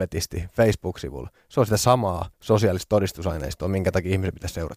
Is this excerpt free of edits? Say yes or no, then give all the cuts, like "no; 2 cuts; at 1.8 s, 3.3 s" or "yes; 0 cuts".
no; 1 cut; at 2.3 s